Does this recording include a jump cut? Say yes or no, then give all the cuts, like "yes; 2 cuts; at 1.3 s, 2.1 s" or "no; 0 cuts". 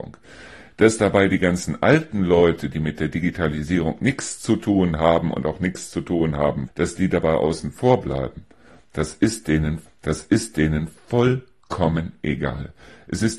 yes; 2 cuts; at 6.7 s, 9.9 s